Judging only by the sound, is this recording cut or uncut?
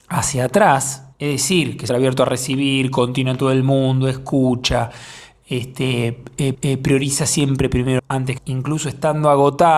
cut